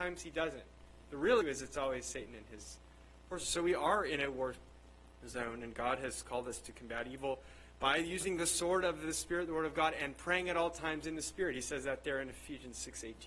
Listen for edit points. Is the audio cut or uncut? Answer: cut